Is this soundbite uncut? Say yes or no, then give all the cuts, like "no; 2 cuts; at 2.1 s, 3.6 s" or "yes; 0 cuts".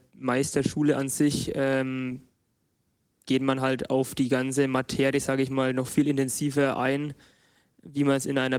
yes; 0 cuts